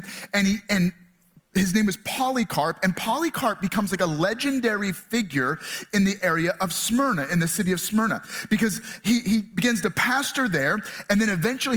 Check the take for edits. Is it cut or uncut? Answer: uncut